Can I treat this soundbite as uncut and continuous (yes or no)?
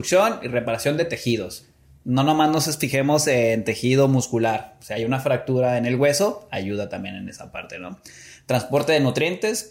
yes